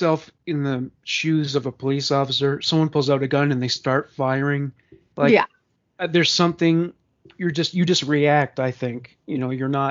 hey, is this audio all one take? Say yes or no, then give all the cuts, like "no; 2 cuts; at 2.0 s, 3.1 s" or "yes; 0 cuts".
yes; 0 cuts